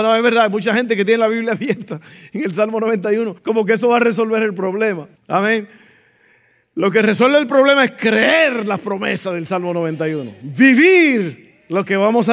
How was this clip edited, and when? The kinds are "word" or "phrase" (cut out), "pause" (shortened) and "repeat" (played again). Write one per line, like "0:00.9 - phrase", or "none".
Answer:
0:03.4 - pause
0:05.2 - pause